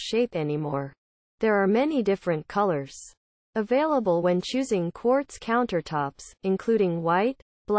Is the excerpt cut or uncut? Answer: uncut